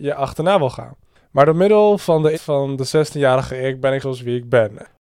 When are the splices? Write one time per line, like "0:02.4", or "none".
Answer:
0:02.3
0:04.0